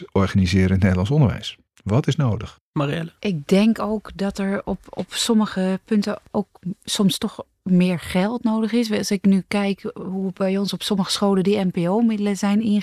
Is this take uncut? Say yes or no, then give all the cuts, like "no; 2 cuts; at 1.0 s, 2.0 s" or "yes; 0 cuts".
no; 2 cuts; at 1.7 s, 3.2 s